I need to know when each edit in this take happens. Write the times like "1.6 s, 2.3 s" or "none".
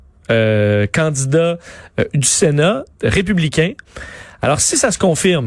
2.9 s